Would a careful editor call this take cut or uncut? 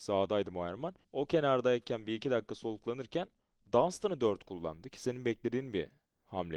cut